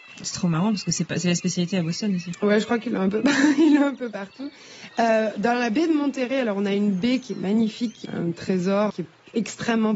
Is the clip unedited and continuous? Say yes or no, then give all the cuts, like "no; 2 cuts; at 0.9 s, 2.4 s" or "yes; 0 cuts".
no; 2 cuts; at 8.0 s, 8.9 s